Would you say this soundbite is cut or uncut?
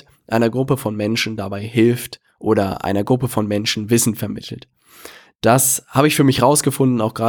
uncut